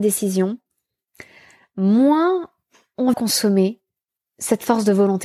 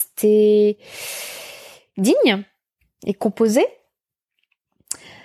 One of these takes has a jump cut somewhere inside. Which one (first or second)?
first